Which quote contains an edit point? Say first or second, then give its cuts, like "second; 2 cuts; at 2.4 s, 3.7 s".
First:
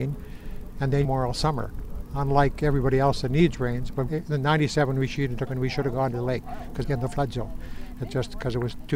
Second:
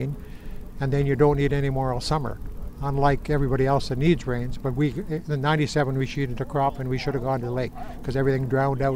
first; 4 cuts; at 1.0 s, 4.1 s, 5.5 s, 6.8 s